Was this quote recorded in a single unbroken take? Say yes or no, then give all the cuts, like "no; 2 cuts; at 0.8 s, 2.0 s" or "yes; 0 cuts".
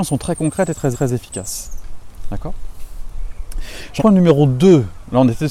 no; 2 cuts; at 0.9 s, 4.0 s